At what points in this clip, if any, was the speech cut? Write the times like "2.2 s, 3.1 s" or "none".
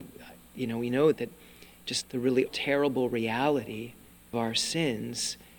1.1 s, 2.0 s, 2.5 s, 4.3 s